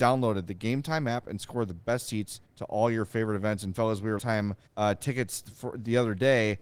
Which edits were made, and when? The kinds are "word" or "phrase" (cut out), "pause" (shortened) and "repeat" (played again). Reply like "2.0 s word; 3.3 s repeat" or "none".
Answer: 2.4 s pause; 4.2 s phrase; 4.7 s pause